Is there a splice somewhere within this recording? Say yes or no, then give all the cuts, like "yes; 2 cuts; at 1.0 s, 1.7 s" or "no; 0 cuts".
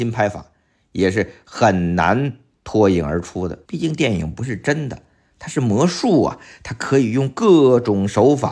yes; 1 cut; at 3.7 s